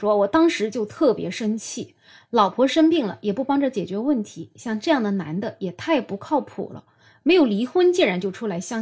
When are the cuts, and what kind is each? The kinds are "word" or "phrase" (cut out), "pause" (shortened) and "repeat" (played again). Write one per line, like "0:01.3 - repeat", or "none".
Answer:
none